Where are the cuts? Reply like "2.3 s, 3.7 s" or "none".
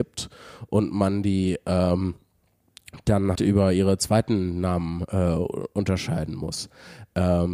3.3 s